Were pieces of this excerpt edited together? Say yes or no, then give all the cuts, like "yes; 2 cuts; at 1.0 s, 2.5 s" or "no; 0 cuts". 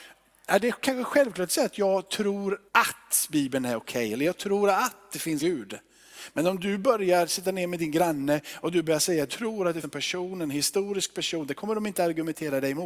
yes; 4 cuts; at 2.7 s, 5.4 s, 9.3 s, 9.8 s